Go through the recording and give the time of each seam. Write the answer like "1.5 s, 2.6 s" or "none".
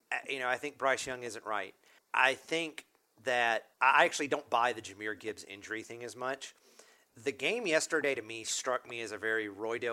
2.0 s, 3.7 s